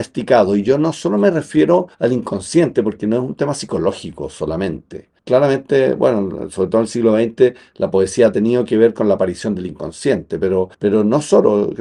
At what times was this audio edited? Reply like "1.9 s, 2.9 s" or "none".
1.9 s, 5.2 s, 10.7 s